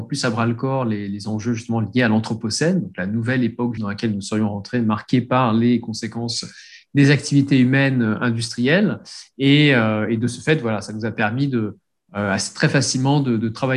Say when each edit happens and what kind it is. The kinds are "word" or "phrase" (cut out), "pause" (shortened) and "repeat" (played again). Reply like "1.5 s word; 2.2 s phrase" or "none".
3.8 s word